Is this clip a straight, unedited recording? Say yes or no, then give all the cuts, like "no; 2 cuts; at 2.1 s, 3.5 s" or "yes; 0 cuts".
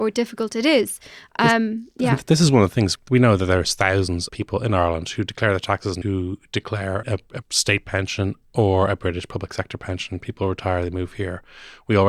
no; 4 cuts; at 4.3 s, 6.0 s, 7.0 s, 7.4 s